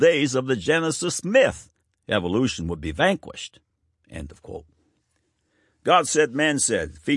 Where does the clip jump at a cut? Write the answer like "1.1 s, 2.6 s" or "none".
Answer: 1.8 s